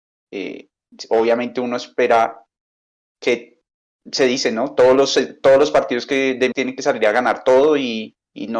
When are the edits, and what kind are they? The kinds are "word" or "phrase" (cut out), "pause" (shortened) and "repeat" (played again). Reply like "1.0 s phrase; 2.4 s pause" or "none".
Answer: 6.5 s word